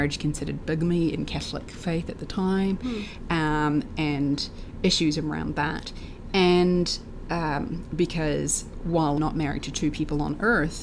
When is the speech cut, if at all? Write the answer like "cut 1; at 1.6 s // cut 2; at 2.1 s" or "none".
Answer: cut 1; at 9.2 s

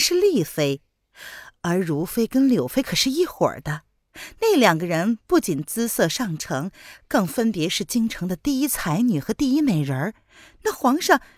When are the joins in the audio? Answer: none

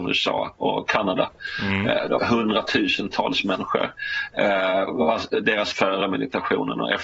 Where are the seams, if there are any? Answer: cut 1; at 2.2 s // cut 2; at 5.7 s

